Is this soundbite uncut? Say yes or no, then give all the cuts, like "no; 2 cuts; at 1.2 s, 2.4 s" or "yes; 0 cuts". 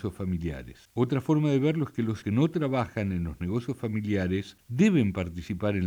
no; 1 cut; at 2.2 s